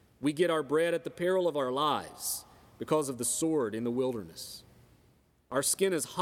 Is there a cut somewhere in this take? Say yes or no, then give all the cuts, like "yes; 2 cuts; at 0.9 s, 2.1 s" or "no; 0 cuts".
no; 0 cuts